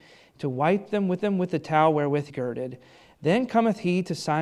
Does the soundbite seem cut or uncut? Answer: cut